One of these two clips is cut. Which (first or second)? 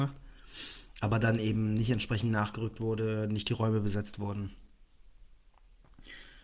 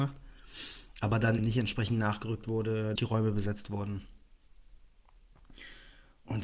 second